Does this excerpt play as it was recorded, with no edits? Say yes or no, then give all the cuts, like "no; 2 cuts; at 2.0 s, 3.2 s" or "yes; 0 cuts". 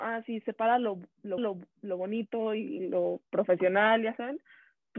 no; 2 cuts; at 1.4 s, 3.3 s